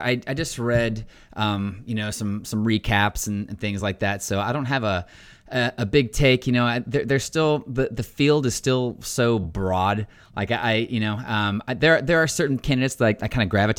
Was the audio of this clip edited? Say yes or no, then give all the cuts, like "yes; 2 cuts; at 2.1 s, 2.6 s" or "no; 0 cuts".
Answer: no; 0 cuts